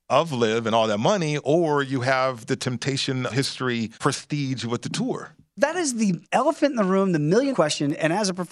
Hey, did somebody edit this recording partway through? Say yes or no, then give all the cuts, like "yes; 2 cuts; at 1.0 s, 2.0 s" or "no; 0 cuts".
yes; 4 cuts; at 3.3 s, 3.9 s, 6.2 s, 7.5 s